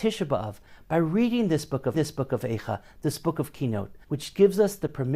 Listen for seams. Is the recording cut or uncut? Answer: cut